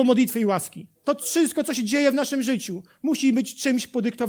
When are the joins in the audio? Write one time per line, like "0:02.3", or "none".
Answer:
0:00.9